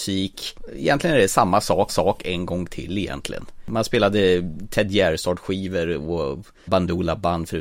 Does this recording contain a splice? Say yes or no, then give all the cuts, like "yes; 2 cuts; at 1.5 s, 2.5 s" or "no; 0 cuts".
yes; 2 cuts; at 1.9 s, 6.7 s